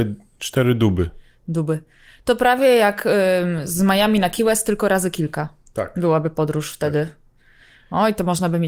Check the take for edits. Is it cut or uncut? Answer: uncut